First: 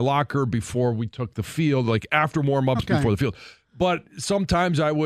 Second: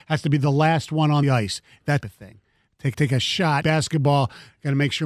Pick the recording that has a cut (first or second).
second